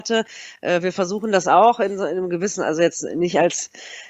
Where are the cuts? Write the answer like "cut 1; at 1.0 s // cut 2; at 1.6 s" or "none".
none